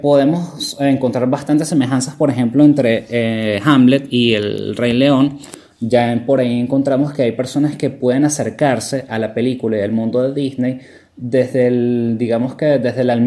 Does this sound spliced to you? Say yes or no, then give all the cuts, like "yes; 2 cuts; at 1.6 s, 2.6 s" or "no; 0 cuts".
no; 0 cuts